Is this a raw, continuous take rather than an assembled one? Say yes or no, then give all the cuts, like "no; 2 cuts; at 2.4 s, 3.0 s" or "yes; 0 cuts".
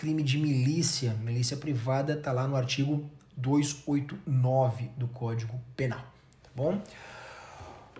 yes; 0 cuts